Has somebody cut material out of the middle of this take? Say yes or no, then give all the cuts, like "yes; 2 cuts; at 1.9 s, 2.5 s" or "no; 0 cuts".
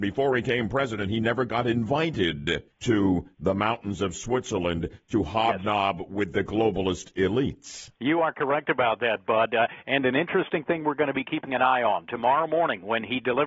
yes; 1 cut; at 2.7 s